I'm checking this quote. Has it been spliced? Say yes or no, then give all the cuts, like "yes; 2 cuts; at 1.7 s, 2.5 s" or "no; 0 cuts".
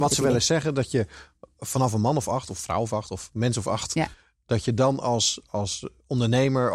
no; 0 cuts